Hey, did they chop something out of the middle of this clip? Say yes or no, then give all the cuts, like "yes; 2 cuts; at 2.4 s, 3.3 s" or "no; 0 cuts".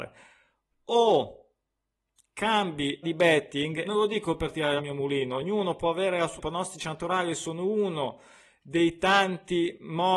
yes; 4 cuts; at 3.0 s, 3.8 s, 4.8 s, 6.4 s